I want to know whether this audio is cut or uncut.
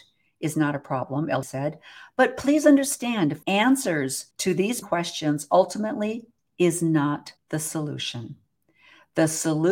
cut